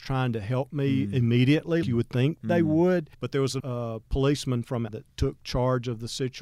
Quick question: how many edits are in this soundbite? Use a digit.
5